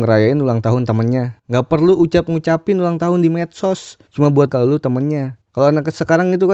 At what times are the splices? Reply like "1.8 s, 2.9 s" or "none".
4.1 s, 4.5 s, 5.5 s